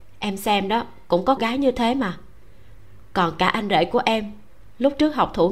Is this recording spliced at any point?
yes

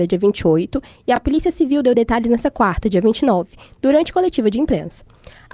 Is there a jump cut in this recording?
no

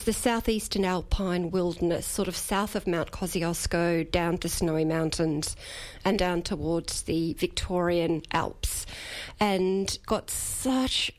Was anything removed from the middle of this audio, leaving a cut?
yes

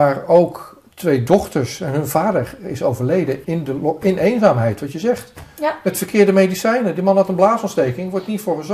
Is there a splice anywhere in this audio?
yes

